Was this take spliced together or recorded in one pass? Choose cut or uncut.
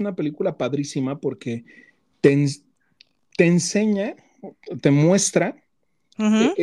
uncut